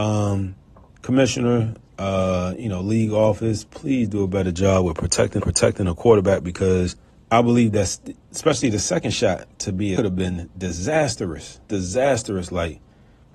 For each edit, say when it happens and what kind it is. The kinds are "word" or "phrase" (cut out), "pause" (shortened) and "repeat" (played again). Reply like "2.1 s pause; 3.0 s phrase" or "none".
3.7 s word; 5.4 s repeat; 7.1 s pause; 8.3 s word; 9.5 s pause; 10.0 s phrase; 11.6 s pause